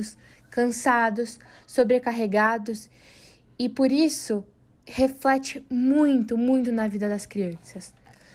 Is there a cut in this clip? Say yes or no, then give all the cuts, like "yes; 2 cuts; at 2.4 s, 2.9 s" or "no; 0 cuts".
no; 0 cuts